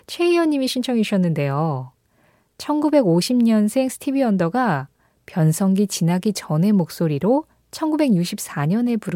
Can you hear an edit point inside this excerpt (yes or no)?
no